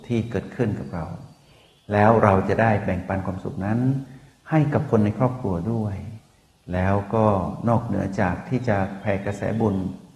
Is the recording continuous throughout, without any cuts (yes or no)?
yes